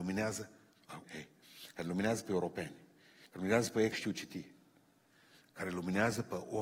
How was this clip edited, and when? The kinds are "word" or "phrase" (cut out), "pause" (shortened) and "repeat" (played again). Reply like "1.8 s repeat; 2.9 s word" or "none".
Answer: 1.0 s word; 3.9 s word